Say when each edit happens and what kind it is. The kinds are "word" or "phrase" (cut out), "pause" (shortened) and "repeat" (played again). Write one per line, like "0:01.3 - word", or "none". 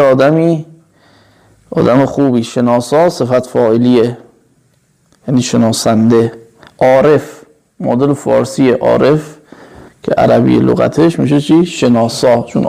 none

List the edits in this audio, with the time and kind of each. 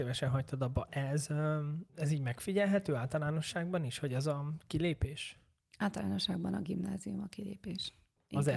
0:01.9 - pause
0:05.6 - pause

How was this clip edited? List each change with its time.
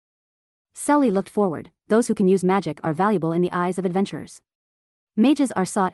none

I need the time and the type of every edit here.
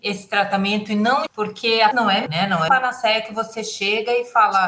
0:01.3 - word
0:01.9 - word
0:02.3 - word
0:02.7 - word

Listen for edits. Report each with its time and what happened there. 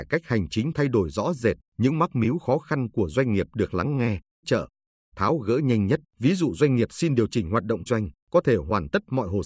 0:01.7 - pause
0:04.4 - word
0:06.1 - pause
0:07.9 - word
0:08.2 - pause

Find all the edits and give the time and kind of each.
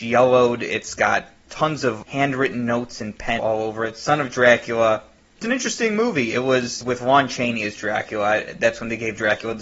0:03.4 - phrase
0:05.4 - word

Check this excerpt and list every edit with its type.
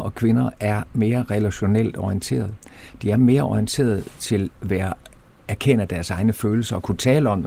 0:04.5 - word

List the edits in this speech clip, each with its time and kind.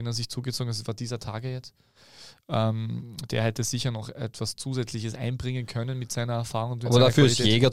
none

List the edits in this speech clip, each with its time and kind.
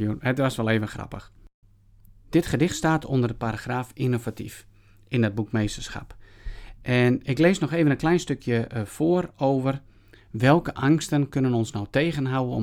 none

